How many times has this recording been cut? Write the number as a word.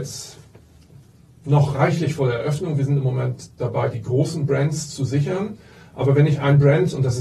zero